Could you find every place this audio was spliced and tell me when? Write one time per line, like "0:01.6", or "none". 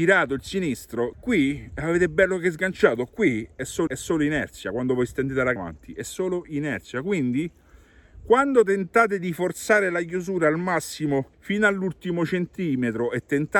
0:01.1
0:03.9
0:05.6
0:11.3

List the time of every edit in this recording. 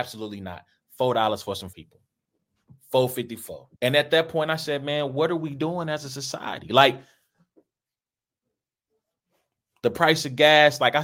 0:01.7
0:03.7

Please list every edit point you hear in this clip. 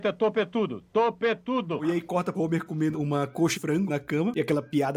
0:02.3
0:02.9
0:03.5
0:03.9

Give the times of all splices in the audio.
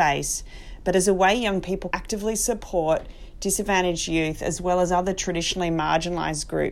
0:01.9

